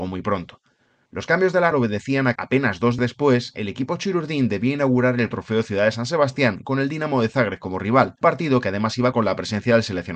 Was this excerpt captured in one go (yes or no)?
no